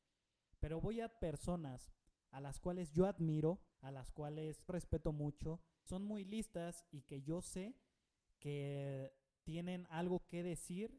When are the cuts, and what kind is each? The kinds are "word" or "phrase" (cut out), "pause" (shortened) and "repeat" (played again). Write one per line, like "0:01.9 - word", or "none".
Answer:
0:01.2 - phrase
0:03.7 - pause
0:04.7 - word
0:05.9 - phrase

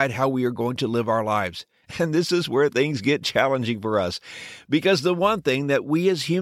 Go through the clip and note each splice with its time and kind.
none

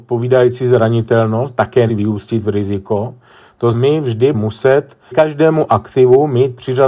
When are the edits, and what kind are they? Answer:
0:01.9 - word
0:03.7 - word
0:04.3 - word
0:05.1 - word

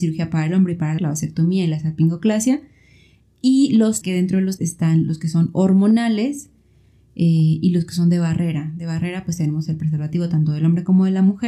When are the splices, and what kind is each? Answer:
0:01.0 - word
0:04.0 - word
0:04.6 - word

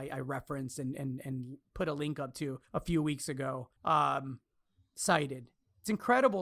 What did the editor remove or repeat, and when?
0:02.6 - pause
0:03.8 - pause

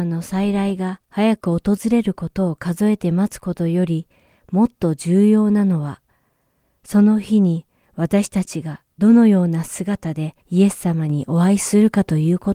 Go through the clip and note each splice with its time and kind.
0:10.4 - pause

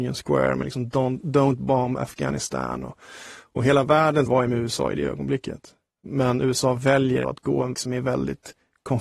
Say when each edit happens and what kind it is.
0:04.3 - word
0:07.2 - word
0:07.7 - word

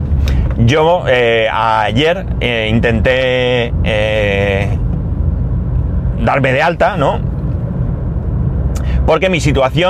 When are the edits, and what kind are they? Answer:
none

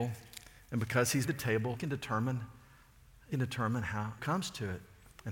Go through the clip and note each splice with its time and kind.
0:01.2 - word
0:01.7 - word
0:03.3 - word
0:04.2 - word

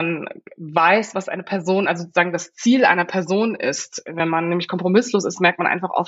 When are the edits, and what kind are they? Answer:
none

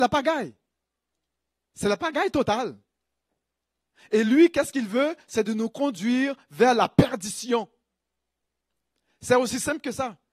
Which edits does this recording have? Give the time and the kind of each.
none

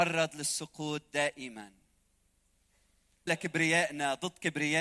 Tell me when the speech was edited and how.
0:03.3 - word

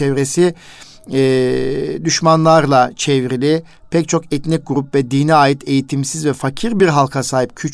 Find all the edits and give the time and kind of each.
none

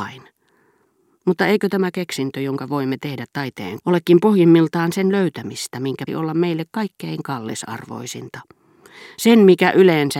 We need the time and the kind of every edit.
0:03.8 - word
0:06.1 - word

